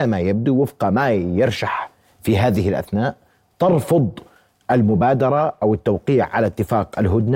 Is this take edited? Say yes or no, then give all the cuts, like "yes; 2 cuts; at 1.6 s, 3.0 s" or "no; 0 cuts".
no; 0 cuts